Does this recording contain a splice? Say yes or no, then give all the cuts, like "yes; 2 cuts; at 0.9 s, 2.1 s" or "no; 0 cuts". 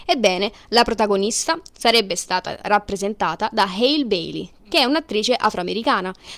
no; 0 cuts